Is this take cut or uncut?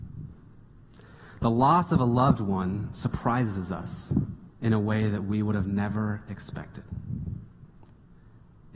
cut